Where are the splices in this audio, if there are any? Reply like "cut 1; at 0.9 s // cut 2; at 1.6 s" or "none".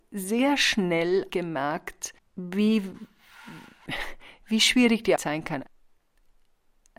cut 1; at 1.3 s // cut 2; at 5.2 s